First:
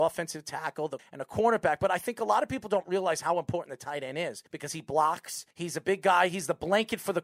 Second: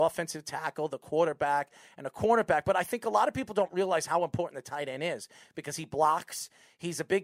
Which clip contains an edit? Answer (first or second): first